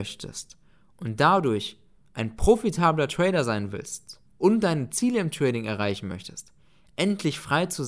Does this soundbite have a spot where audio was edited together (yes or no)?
yes